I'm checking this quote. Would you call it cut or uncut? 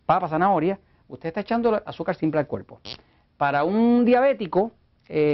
uncut